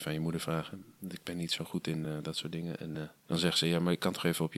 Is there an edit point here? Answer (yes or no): no